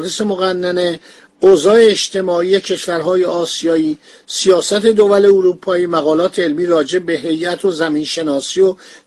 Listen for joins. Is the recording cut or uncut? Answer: uncut